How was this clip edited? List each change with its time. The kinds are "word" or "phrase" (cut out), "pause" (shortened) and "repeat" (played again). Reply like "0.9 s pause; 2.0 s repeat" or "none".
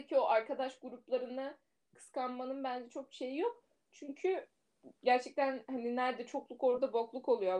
none

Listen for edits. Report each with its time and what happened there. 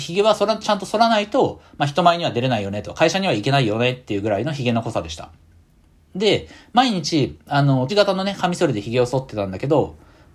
7.9 s word

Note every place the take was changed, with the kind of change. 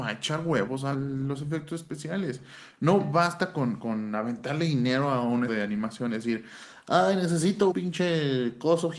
0.9 s phrase; 3.8 s word; 5.5 s word; 7.7 s word

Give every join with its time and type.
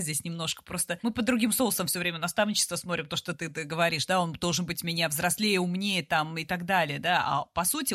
none

